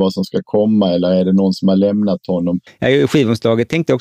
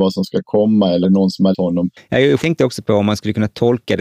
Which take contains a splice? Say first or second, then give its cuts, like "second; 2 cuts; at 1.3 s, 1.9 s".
second; 3 cuts; at 1.0 s, 1.5 s, 2.4 s